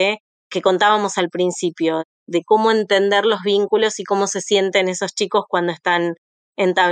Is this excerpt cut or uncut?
uncut